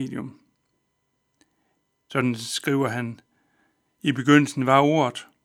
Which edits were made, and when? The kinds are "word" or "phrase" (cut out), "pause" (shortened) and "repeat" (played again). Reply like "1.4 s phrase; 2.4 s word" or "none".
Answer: none

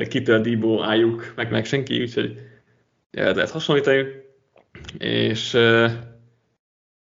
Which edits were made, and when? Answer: 1.5 s word; 3.3 s phrase

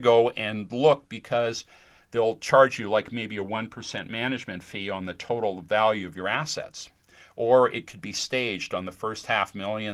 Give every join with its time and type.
none

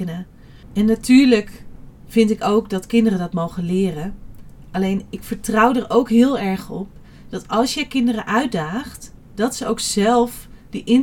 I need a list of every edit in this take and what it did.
none

